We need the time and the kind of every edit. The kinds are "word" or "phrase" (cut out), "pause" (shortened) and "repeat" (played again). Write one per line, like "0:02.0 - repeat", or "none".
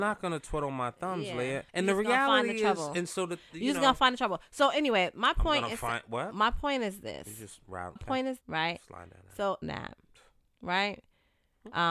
0:01.7 - pause
0:08.0 - word
0:08.4 - word
0:09.6 - phrase